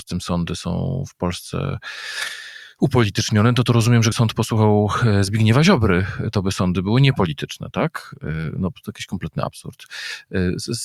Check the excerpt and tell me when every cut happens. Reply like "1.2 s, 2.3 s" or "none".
4.1 s